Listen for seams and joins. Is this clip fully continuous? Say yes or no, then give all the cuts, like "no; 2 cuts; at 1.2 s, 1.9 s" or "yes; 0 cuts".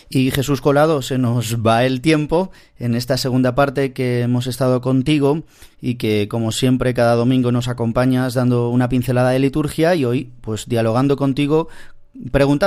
yes; 0 cuts